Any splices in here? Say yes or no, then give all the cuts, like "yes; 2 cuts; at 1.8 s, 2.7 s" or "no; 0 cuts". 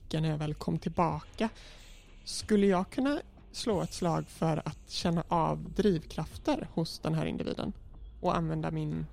no; 0 cuts